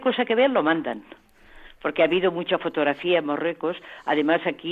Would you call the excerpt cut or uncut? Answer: uncut